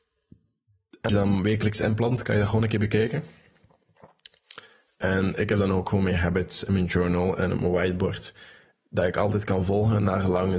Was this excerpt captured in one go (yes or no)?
no